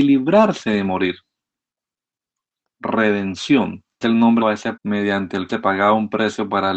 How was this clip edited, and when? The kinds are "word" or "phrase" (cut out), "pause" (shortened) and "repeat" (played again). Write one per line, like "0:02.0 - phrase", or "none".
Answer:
0:04.0 - word
0:04.4 - word
0:04.8 - word
0:05.5 - word